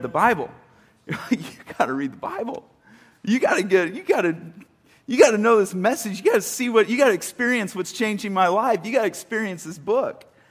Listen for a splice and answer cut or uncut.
uncut